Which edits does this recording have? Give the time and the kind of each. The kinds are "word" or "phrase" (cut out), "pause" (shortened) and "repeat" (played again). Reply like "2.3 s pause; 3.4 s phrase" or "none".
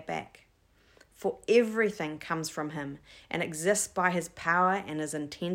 none